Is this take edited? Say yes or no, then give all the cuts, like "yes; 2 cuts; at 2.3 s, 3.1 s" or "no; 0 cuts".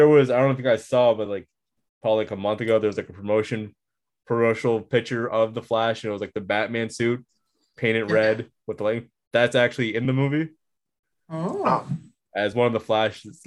no; 0 cuts